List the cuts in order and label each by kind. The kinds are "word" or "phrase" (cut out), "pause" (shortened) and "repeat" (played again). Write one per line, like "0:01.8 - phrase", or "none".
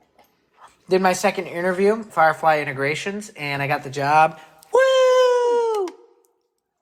0:02.1 - word